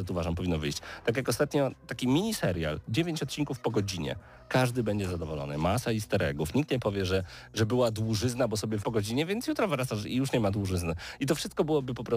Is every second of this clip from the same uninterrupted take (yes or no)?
no